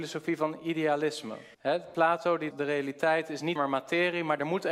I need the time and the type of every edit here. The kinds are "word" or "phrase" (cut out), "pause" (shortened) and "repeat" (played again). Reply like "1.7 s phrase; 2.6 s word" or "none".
1.5 s pause; 2.5 s word; 3.6 s word